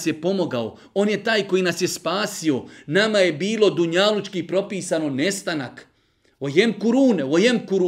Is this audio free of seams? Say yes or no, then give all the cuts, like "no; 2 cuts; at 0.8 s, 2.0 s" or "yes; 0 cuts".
yes; 0 cuts